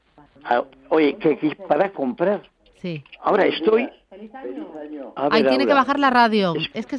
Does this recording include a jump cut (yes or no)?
no